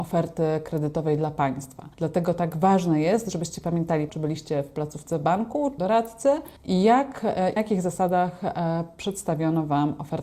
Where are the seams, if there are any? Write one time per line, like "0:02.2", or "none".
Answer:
0:01.9
0:04.1
0:05.8
0:06.6
0:07.6